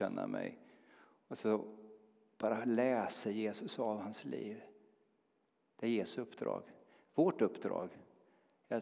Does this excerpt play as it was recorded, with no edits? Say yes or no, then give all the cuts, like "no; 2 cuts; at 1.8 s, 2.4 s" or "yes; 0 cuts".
yes; 0 cuts